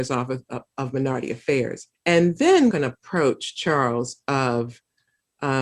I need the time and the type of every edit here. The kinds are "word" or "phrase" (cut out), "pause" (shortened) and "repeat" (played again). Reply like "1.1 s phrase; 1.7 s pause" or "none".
1.9 s pause; 2.7 s phrase